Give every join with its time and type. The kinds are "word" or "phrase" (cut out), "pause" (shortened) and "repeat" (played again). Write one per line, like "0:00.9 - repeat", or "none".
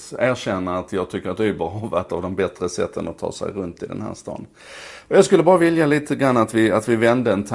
0:02.1 - word